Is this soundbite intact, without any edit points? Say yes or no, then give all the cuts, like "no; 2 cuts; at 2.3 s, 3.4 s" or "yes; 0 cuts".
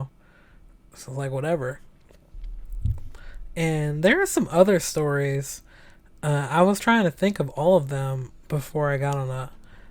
yes; 0 cuts